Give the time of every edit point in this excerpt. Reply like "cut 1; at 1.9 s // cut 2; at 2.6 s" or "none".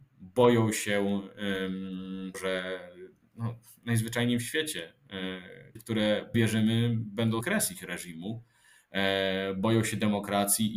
cut 1; at 2.3 s // cut 2; at 5.8 s // cut 3; at 6.3 s // cut 4; at 7.4 s